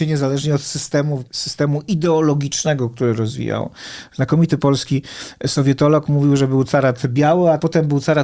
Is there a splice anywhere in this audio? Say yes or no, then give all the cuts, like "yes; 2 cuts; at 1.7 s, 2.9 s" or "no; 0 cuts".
no; 0 cuts